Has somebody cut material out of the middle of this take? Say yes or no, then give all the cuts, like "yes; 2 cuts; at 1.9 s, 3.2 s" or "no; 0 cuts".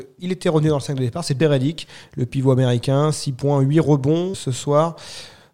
yes; 2 cuts; at 1.4 s, 4.3 s